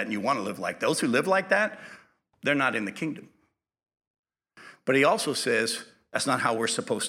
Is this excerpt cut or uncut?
uncut